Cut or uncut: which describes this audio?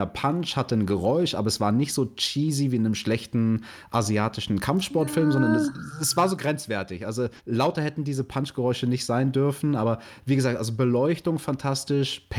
cut